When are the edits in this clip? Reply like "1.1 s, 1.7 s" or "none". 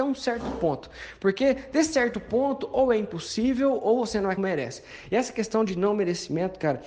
4.4 s